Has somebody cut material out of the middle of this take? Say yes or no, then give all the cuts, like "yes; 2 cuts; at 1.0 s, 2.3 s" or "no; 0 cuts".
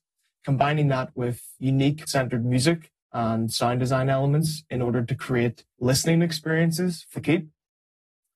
yes; 4 cuts; at 2.1 s, 3.0 s, 5.7 s, 7.1 s